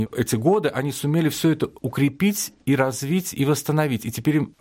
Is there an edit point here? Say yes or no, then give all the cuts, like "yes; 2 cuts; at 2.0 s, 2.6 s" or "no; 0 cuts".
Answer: no; 0 cuts